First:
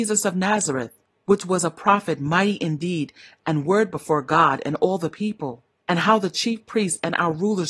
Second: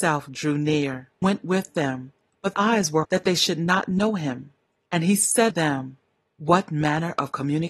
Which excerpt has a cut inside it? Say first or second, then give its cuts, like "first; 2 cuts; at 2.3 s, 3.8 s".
second; 4 cuts; at 1.2 s, 2.5 s, 3.0 s, 5.5 s